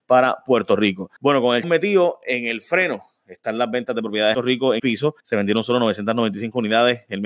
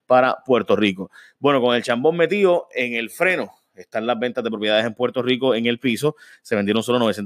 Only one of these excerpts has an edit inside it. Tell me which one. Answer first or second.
first